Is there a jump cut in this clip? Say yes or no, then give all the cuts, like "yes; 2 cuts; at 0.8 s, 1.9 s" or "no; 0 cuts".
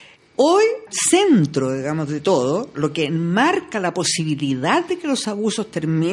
yes; 1 cut; at 0.9 s